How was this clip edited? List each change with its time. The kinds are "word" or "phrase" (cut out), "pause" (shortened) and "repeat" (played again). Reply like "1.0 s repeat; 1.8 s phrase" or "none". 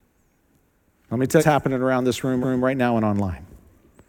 1.4 s phrase; 2.4 s repeat